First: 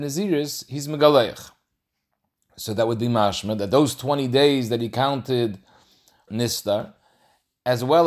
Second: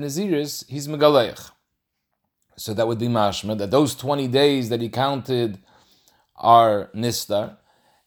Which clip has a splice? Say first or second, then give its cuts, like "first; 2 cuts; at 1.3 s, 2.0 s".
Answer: first; 1 cut; at 6.3 s